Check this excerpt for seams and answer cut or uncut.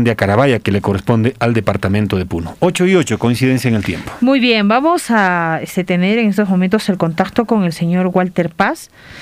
uncut